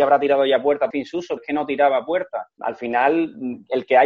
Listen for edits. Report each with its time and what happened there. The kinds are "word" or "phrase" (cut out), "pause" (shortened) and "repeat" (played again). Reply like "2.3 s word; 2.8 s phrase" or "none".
0.9 s word; 1.4 s word